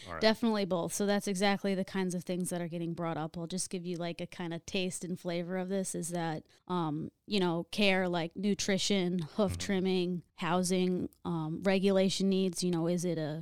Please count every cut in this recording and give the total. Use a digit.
2